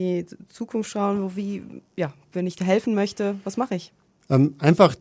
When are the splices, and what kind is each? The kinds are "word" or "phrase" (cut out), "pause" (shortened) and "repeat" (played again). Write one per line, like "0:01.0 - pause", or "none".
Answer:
0:01.9 - pause